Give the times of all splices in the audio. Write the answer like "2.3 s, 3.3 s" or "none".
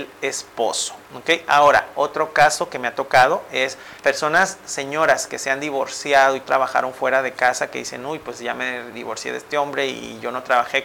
4.0 s, 6.4 s